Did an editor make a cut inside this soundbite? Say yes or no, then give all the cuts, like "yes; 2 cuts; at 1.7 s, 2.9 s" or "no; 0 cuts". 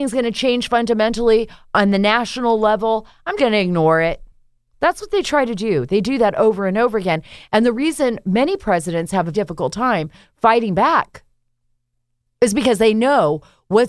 yes; 2 cuts; at 3.4 s, 9.3 s